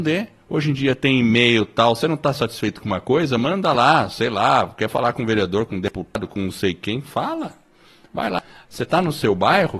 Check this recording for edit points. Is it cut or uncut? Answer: uncut